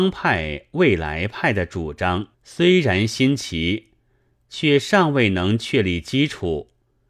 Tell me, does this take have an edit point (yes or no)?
yes